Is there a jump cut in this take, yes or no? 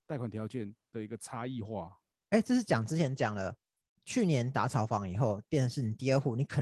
no